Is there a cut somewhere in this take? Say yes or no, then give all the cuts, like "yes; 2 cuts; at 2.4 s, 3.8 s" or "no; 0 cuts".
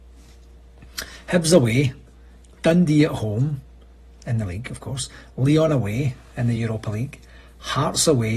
no; 0 cuts